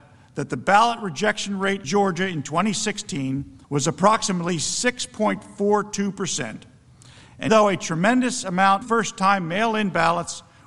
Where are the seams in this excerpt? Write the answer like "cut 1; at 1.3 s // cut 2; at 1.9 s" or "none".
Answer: cut 1; at 1.8 s // cut 2; at 3.6 s // cut 3; at 7.5 s // cut 4; at 8.8 s